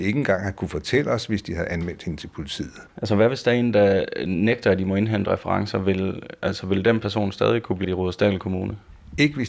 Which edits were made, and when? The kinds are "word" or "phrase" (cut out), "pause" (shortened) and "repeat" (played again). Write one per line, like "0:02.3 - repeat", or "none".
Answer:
0:02.9 - pause
0:07.8 - word